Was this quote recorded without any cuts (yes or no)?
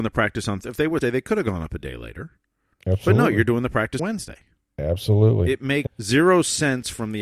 no